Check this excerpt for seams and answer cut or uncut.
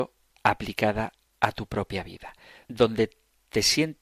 uncut